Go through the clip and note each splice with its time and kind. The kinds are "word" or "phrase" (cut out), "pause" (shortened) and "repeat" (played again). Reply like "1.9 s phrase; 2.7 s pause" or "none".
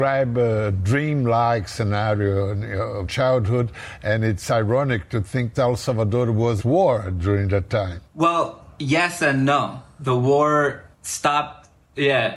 3.0 s word; 5.5 s word; 6.6 s word; 8.0 s pause; 10.9 s pause